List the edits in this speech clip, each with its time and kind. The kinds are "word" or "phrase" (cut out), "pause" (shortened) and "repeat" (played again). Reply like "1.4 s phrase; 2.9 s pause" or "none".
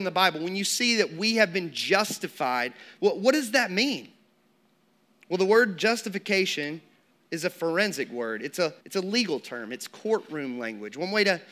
8.8 s pause